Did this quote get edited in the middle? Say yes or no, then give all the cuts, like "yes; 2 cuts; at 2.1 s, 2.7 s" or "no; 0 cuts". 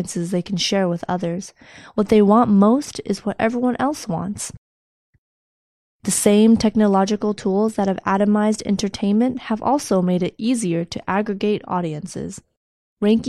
no; 0 cuts